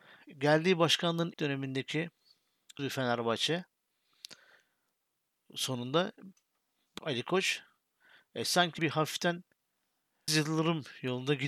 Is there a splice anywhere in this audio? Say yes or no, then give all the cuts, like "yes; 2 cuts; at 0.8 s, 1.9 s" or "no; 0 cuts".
yes; 5 cuts; at 1.3 s, 2.8 s, 7.0 s, 8.8 s, 10.3 s